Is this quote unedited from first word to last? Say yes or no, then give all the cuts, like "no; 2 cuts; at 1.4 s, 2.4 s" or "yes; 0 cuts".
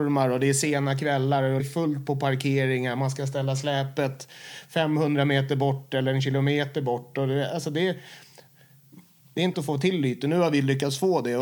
no; 2 cuts; at 1.6 s, 9.5 s